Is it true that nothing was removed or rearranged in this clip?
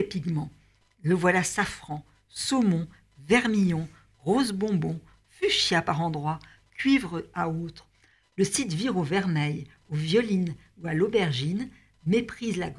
yes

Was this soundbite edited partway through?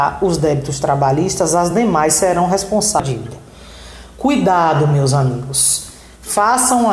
no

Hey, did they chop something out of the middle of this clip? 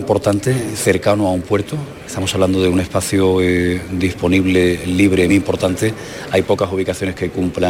yes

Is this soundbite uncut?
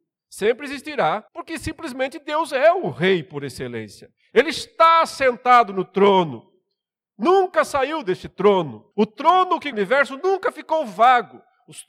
no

